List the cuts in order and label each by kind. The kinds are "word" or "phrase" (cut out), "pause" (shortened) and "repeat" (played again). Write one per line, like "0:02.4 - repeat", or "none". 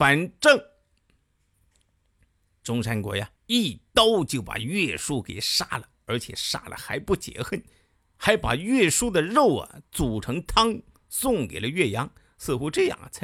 0:03.4 - pause